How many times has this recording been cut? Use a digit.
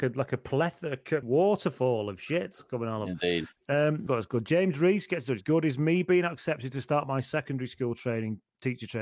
4